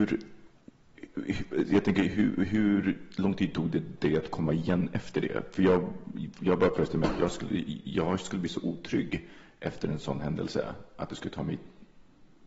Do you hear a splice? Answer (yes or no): no